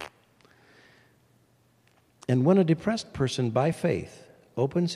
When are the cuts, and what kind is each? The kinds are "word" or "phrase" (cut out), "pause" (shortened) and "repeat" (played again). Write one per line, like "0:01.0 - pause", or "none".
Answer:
none